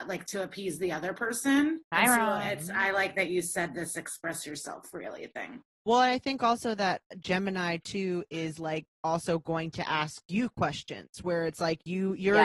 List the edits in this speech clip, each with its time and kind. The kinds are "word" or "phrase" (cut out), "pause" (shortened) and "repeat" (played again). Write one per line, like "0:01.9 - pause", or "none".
0:01.8 - pause